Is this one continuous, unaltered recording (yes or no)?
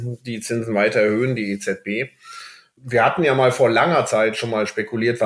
yes